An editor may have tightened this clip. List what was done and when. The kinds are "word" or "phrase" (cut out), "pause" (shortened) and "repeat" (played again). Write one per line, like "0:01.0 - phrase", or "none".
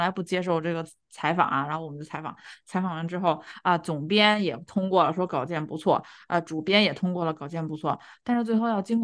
none